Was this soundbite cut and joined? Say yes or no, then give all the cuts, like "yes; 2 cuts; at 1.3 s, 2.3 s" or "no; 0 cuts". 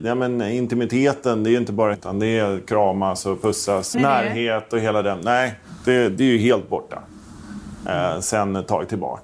yes; 2 cuts; at 1.9 s, 3.9 s